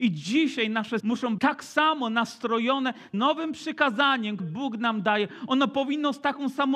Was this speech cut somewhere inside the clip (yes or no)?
yes